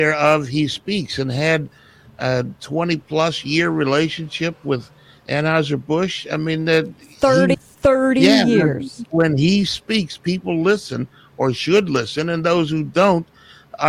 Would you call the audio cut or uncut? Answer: cut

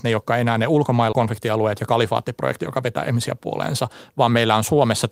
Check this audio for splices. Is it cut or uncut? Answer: cut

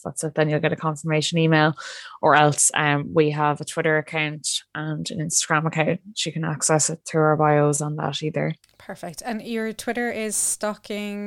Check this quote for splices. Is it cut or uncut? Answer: uncut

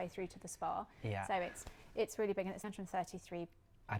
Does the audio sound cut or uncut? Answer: cut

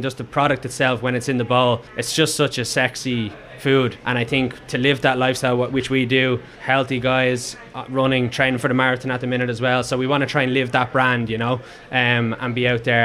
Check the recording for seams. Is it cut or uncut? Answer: cut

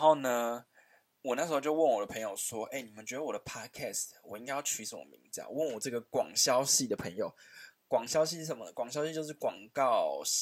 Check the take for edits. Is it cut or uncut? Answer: uncut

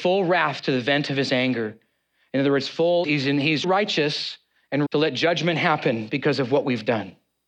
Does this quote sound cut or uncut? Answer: cut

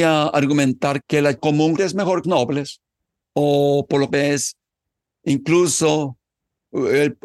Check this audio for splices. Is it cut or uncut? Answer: cut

